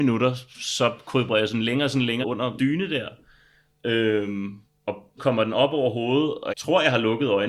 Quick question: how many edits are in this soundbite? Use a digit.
4